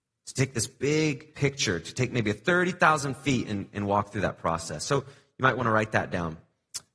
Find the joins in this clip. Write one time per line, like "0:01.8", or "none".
0:01.3